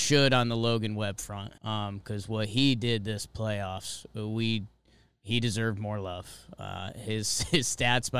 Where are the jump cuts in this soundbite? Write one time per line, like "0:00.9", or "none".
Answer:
0:01.6